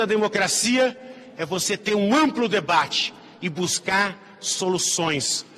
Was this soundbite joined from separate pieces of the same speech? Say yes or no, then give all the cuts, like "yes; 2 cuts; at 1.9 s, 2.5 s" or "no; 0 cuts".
no; 0 cuts